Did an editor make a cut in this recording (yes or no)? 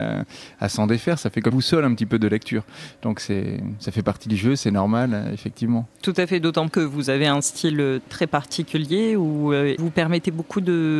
yes